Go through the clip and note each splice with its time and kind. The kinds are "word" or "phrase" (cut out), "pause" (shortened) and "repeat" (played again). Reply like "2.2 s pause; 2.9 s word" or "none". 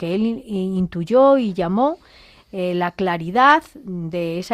none